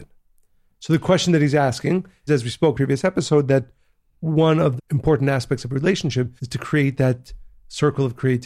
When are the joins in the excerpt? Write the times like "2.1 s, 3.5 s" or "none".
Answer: 2.3 s, 2.7 s, 4.8 s, 6.4 s